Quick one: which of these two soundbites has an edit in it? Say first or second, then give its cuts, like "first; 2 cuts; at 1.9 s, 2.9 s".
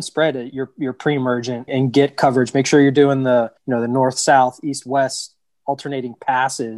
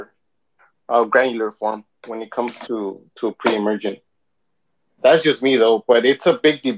first; 2 cuts; at 1.7 s, 3.6 s